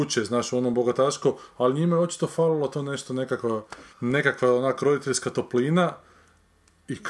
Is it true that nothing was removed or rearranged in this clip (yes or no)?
no